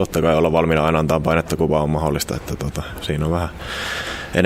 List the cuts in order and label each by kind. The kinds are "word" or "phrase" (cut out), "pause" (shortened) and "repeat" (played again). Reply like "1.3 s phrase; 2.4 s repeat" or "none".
none